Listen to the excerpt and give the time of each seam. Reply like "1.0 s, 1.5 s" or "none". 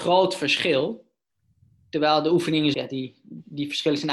2.7 s